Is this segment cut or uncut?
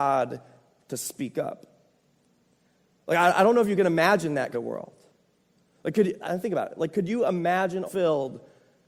cut